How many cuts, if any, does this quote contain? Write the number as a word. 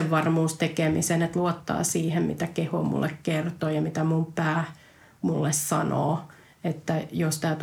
zero